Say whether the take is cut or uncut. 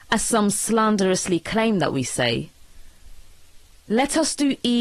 cut